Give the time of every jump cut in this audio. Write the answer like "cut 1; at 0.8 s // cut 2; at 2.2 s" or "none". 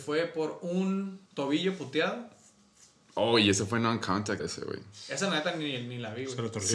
cut 1; at 1.3 s // cut 2; at 4.4 s